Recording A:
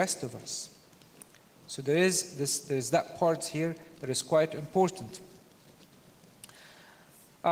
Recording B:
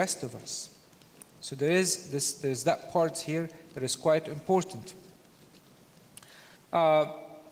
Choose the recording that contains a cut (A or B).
B